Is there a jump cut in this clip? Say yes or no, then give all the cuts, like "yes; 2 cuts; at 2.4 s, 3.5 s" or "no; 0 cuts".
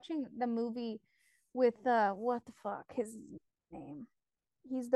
no; 0 cuts